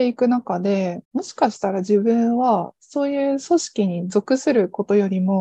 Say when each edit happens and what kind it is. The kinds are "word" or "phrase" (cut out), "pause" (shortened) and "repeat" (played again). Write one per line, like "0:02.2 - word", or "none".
0:01.0 - pause